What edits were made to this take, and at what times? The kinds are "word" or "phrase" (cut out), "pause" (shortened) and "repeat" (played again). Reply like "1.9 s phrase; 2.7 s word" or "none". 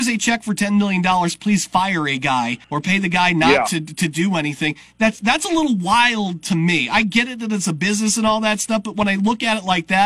2.6 s pause